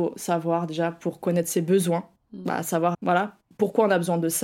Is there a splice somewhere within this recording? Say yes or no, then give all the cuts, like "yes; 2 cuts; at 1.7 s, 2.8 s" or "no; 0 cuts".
yes; 1 cut; at 2.9 s